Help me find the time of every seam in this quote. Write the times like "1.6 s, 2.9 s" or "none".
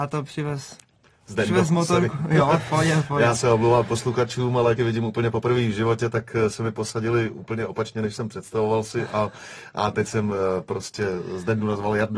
4.8 s